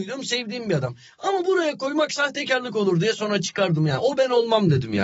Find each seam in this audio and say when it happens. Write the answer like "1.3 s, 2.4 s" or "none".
none